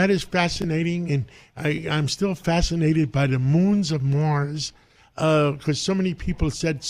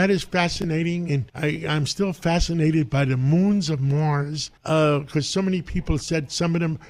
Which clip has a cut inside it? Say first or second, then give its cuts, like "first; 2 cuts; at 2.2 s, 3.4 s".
second; 2 cuts; at 1.3 s, 4.6 s